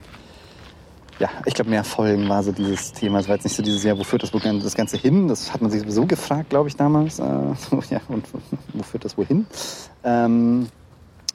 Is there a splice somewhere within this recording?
no; 0 cuts

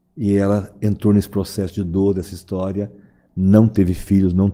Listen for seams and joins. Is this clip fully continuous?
yes; 0 cuts

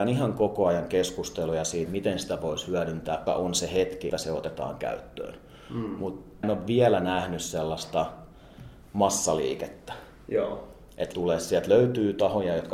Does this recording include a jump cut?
yes; 5 cuts; at 1.9 s, 3.3 s, 4.1 s, 6.4 s, 11.1 s

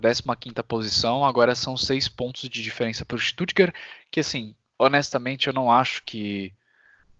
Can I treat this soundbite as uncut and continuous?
yes; 0 cuts

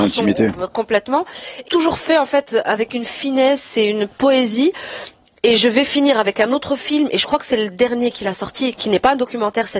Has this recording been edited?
yes; 1 cut; at 1.7 s

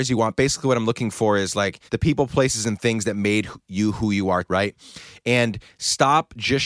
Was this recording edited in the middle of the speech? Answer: yes; 2 cuts; at 1.9 s, 4.4 s

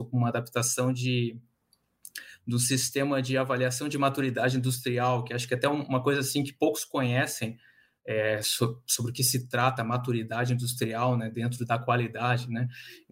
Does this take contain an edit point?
no; 0 cuts

